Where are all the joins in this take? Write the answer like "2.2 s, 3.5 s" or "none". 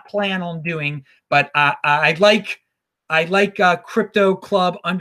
none